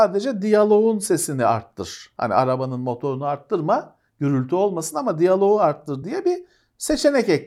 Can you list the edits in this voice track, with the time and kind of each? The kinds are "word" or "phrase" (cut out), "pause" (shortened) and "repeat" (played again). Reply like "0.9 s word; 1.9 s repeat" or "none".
none